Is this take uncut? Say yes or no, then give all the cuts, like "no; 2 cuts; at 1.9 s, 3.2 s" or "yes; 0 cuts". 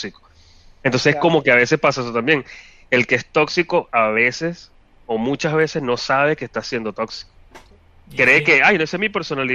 yes; 0 cuts